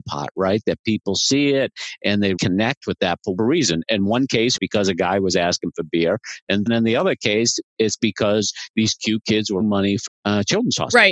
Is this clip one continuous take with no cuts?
no; 6 cuts; at 2.4 s, 3.4 s, 4.6 s, 6.7 s, 9.6 s, 10.1 s

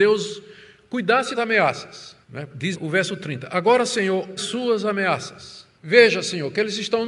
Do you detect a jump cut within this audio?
yes; 5 cuts; at 1.4 s, 2.2 s, 2.7 s, 4.4 s, 5.8 s

